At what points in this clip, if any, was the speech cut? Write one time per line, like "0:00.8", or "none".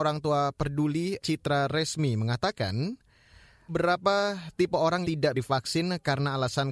0:01.2
0:03.7
0:05.0
0:05.3

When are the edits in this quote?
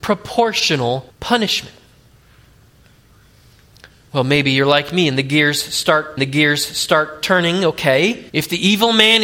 0:01.1
0:06.2
0:08.3

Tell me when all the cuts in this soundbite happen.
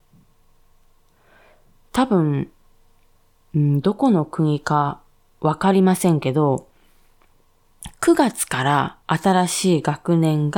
0:09.0

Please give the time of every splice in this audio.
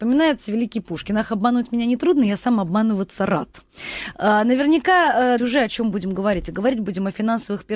0:05.4

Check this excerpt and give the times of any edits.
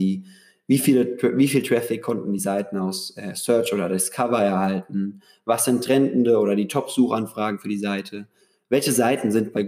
none

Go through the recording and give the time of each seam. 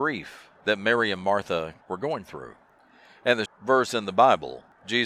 0:01.8
0:03.5

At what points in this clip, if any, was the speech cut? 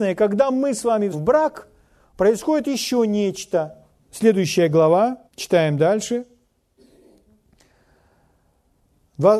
0:01.1
0:04.0
0:05.3

